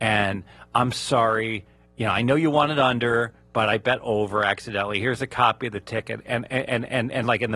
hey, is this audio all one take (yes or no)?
yes